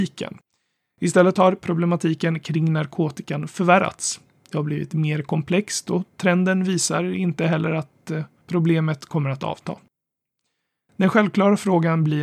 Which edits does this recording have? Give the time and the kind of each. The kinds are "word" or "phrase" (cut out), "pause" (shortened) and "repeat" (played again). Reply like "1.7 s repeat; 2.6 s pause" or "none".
none

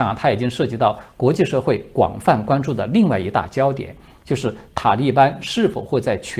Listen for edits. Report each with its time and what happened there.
none

